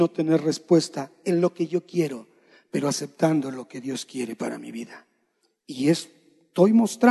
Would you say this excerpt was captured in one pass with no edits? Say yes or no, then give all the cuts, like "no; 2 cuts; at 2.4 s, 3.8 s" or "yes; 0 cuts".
yes; 0 cuts